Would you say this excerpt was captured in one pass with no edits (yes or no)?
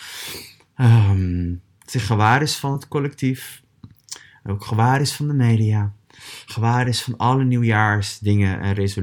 yes